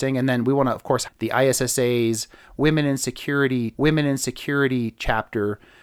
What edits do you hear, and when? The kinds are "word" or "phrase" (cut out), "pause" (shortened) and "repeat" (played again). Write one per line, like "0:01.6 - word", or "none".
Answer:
0:01.0 - word
0:03.7 - repeat